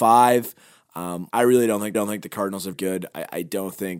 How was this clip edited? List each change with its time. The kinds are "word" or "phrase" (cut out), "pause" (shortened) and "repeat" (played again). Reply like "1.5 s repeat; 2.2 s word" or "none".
1.3 s word; 1.9 s repeat; 2.7 s word

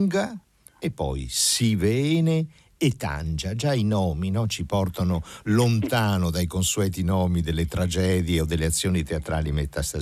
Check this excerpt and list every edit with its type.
none

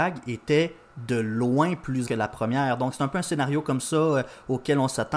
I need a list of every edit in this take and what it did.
2.1 s word

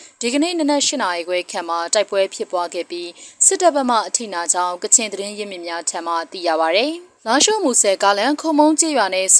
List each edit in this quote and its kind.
7.2 s pause

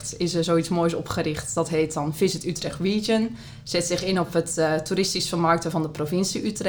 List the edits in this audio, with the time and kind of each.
none

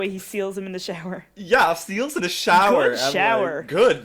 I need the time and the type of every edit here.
2.2 s word

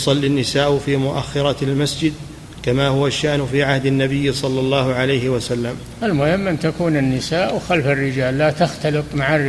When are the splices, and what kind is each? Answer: none

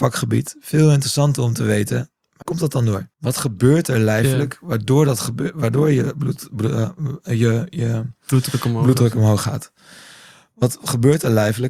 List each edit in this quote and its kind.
2.4 s word; 3.1 s pause

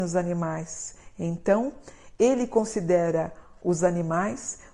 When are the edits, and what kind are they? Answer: none

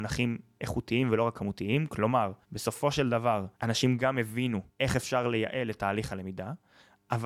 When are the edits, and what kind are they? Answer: 2.4 s pause; 3.5 s pause; 4.7 s pause

